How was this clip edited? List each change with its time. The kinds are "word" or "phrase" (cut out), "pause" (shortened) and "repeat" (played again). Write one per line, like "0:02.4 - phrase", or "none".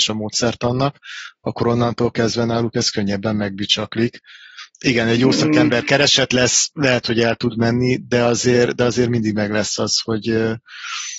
0:04.7 - pause